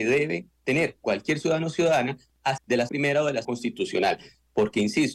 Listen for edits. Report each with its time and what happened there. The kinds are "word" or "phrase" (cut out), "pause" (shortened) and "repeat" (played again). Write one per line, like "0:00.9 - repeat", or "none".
0:02.6 - word
0:02.9 - word
0:03.4 - word